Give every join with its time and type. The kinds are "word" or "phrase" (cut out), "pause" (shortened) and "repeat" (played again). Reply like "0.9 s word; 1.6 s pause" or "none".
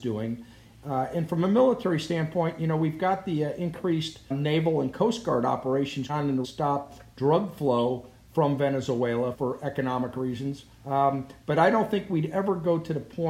4.3 s word; 6.1 s word; 6.4 s phrase; 9.3 s word; 10.7 s pause